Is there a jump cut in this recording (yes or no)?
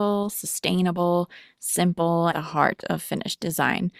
yes